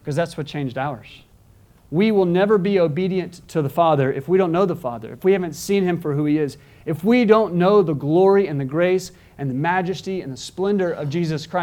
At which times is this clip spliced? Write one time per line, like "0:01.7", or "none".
none